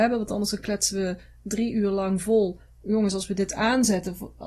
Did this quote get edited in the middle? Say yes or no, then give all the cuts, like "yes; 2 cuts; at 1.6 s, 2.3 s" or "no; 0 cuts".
no; 0 cuts